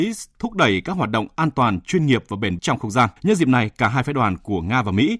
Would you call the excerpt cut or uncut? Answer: cut